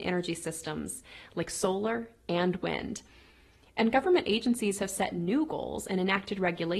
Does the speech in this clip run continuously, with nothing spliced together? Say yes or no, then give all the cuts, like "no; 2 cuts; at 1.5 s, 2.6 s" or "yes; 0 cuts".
yes; 0 cuts